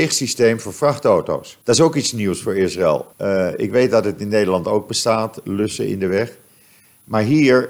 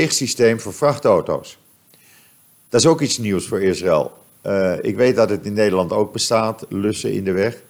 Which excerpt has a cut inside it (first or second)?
first